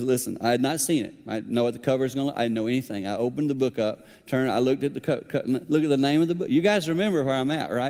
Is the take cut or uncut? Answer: uncut